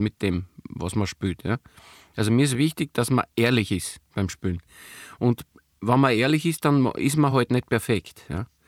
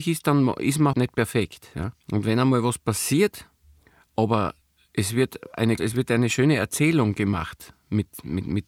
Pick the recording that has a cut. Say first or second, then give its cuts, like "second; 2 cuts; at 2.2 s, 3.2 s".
second; 4 cuts; at 0.9 s, 2.0 s, 4.6 s, 5.8 s